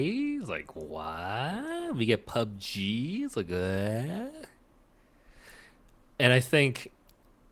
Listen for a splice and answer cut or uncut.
uncut